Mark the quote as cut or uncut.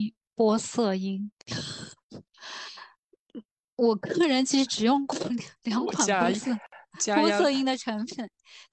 cut